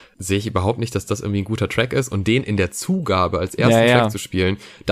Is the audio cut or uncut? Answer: uncut